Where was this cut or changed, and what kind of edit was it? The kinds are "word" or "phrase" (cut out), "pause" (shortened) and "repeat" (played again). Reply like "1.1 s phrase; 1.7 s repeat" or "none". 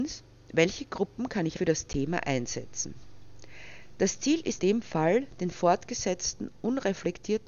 1.6 s phrase; 4.6 s word